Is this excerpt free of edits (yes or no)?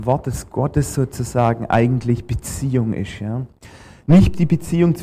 yes